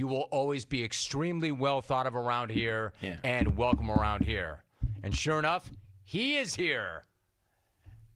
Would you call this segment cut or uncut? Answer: uncut